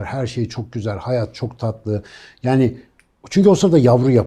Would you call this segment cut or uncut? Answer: uncut